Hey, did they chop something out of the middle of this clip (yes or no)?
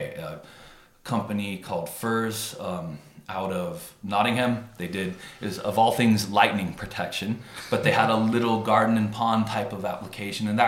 no